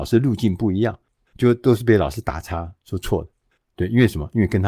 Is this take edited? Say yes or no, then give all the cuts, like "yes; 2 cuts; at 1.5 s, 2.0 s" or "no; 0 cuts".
no; 0 cuts